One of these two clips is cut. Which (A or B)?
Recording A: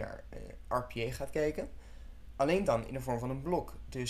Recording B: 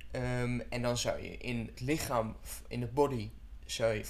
B